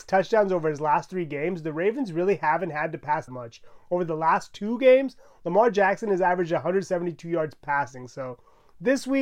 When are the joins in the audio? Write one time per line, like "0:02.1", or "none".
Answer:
0:03.3

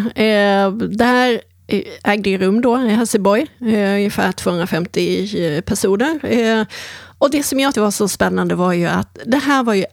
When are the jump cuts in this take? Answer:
0:07.7

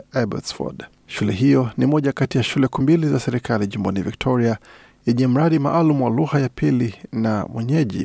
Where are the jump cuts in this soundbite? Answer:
0:02.8

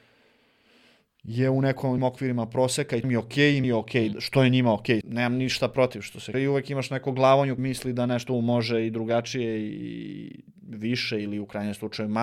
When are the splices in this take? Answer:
0:02.0
0:03.0
0:03.6
0:04.1
0:05.0
0:06.3
0:07.6
0:08.3

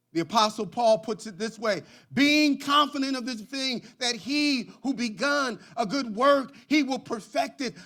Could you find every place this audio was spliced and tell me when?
0:03.4

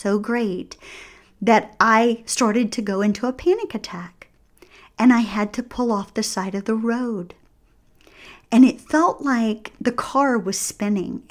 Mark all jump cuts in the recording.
none

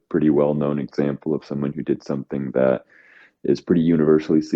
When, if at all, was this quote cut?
none

